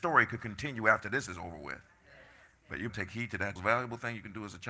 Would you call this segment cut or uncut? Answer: cut